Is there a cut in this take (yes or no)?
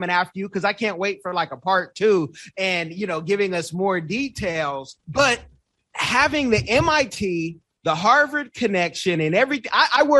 yes